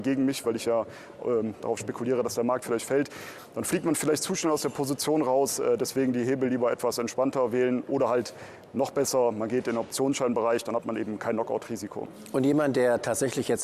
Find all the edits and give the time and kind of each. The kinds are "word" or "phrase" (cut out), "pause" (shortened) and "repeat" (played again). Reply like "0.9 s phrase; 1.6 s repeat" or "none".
none